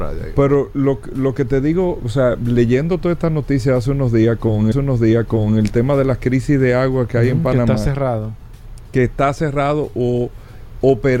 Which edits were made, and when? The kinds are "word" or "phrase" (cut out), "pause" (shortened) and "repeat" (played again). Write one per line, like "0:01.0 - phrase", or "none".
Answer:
0:04.7 - repeat